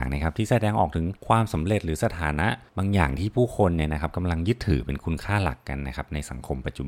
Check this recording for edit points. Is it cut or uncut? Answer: cut